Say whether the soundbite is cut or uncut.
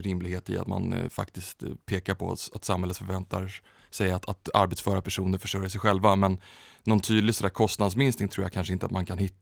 uncut